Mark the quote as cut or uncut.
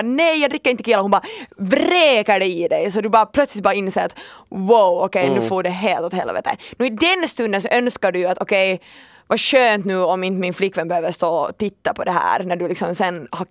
uncut